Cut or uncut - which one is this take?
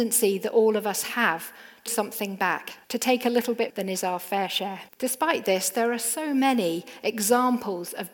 cut